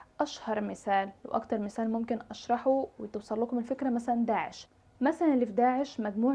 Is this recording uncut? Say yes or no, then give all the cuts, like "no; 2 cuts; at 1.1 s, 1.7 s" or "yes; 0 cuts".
yes; 0 cuts